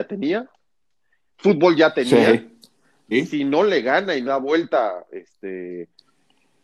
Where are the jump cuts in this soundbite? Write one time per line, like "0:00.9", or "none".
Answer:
0:03.1
0:04.3